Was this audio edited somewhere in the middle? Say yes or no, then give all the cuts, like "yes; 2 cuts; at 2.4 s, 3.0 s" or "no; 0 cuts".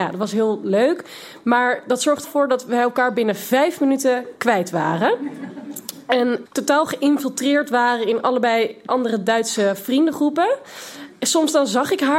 yes; 3 cuts; at 2.2 s, 6.5 s, 8.9 s